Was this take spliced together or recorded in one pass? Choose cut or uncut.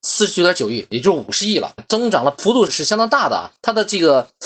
cut